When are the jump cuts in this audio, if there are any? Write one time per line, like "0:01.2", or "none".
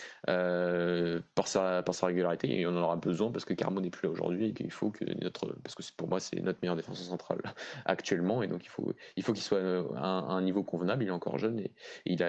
0:04.5